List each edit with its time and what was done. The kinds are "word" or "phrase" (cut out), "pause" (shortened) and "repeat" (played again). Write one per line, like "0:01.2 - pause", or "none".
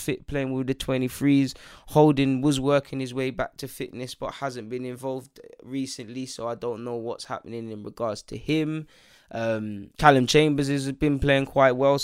0:09.9 - pause